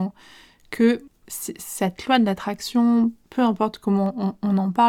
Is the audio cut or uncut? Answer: cut